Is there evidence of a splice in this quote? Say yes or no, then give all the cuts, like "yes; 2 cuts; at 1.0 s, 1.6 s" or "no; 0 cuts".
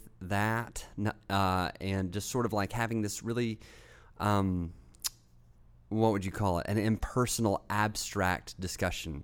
no; 0 cuts